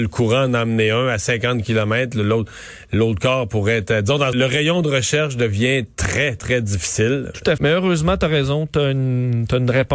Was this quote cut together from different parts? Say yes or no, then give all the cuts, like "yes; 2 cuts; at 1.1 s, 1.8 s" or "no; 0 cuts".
yes; 3 cuts; at 4.3 s, 6.4 s, 7.6 s